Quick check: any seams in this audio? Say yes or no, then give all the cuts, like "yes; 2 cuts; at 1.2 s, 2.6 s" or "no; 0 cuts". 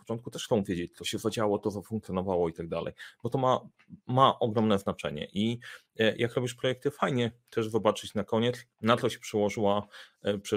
yes; 1 cut; at 8.7 s